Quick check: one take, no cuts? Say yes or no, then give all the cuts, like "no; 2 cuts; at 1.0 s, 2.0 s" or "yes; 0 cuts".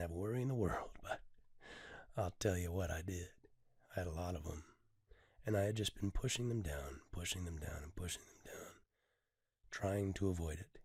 yes; 0 cuts